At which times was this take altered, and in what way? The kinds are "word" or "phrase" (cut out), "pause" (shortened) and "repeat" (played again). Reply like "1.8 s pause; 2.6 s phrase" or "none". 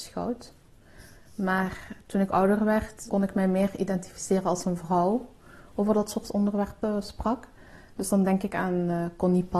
none

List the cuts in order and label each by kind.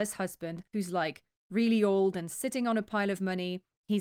none

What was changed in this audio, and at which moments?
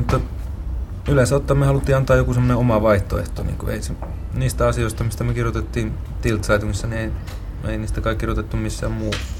none

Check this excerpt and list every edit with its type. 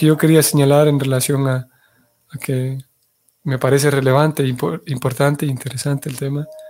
none

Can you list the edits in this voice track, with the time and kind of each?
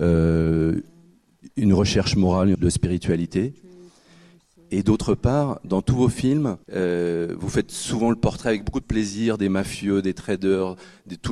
2.5 s word; 5.6 s word; 6.6 s pause

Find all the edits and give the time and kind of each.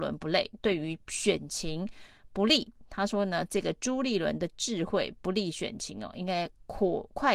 1.0 s pause

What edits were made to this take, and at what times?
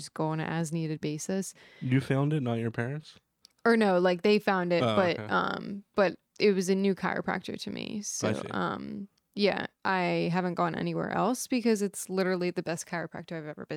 6.3 s pause; 9.2 s pause

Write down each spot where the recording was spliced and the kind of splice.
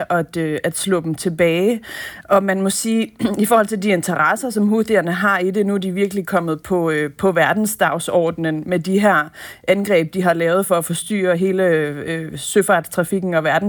none

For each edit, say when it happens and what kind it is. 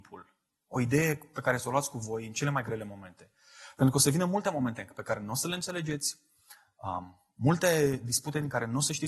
none

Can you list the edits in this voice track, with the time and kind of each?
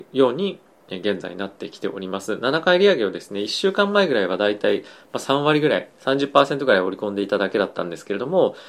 5.9 s pause

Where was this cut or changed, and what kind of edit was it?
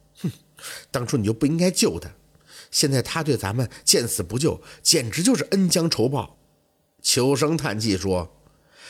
none

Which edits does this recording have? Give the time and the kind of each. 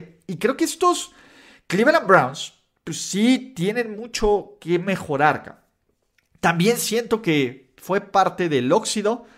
none

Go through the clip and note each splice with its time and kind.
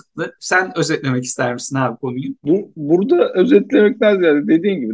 none

